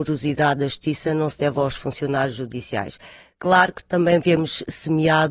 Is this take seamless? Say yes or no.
yes